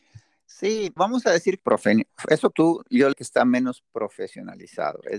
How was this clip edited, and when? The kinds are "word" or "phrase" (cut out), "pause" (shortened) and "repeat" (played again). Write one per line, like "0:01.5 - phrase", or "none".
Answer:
0:01.0 - word
0:01.6 - phrase
0:02.5 - phrase
0:03.1 - word